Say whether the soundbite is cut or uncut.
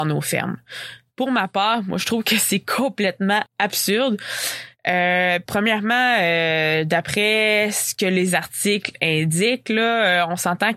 cut